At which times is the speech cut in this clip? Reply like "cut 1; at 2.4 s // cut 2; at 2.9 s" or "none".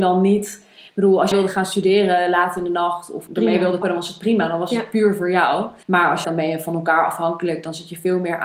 cut 1; at 1.3 s // cut 2; at 3.3 s // cut 3; at 3.8 s // cut 4; at 5.8 s // cut 5; at 6.2 s

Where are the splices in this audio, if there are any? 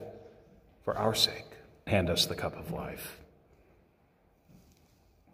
cut 1; at 1.9 s

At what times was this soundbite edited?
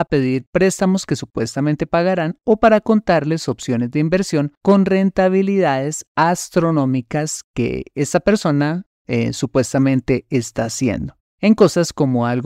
cut 1; at 4.6 s // cut 2; at 11.3 s

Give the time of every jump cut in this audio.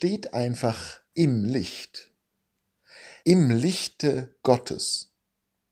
cut 1; at 1.1 s // cut 2; at 3.2 s // cut 3; at 4.4 s

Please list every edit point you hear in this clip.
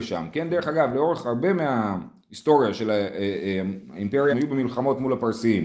cut 1; at 4.3 s

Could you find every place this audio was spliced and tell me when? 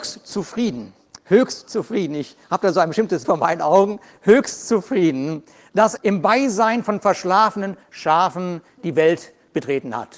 cut 1; at 2.4 s // cut 2; at 3.2 s // cut 3; at 6.0 s

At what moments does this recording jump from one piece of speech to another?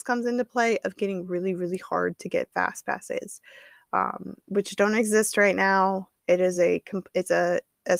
none

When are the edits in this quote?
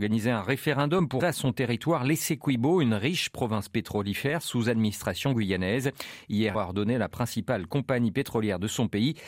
cut 1; at 1.2 s // cut 2; at 6.5 s

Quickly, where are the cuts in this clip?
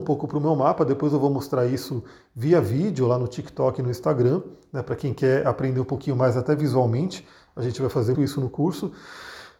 cut 1; at 8.1 s

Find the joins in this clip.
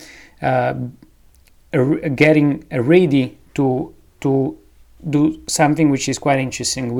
none

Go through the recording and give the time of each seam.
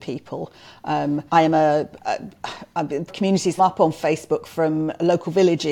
cut 1; at 1.3 s // cut 2; at 3.1 s // cut 3; at 3.6 s

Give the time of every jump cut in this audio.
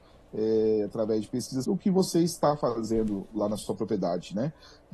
cut 1; at 1.6 s

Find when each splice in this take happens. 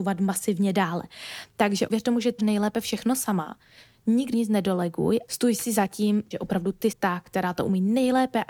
cut 1; at 1.9 s // cut 2; at 2.4 s // cut 3; at 4.3 s // cut 4; at 5.3 s // cut 5; at 6.3 s // cut 6; at 6.9 s

